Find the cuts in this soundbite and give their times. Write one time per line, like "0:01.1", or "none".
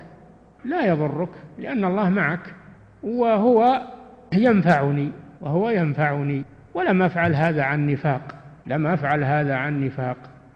0:05.4
0:08.6